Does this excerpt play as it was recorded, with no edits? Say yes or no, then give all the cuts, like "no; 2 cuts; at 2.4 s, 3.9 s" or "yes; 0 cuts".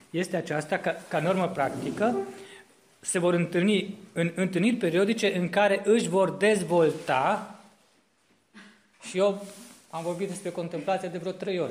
yes; 0 cuts